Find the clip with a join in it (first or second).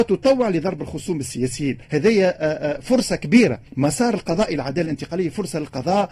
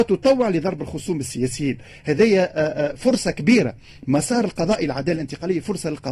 first